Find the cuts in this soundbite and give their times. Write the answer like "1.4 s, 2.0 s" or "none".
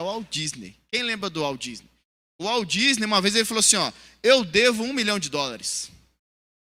none

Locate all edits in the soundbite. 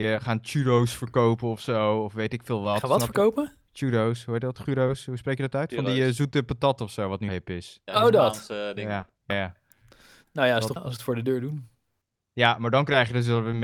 7.3 s, 9.3 s, 10.8 s

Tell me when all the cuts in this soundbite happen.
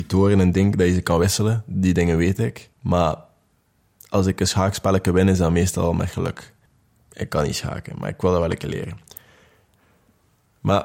2.7 s, 6.7 s

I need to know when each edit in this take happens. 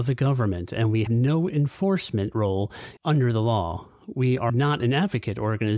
1.1 s, 3.0 s, 4.5 s

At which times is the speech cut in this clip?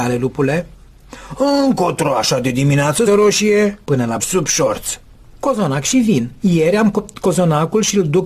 3.1 s, 3.8 s, 4.2 s

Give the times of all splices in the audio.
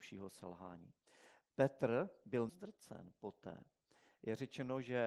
2.5 s

